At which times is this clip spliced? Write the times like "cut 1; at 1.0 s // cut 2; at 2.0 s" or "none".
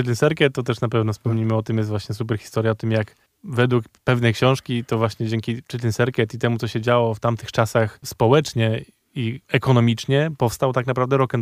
cut 1; at 3.3 s // cut 2; at 9.4 s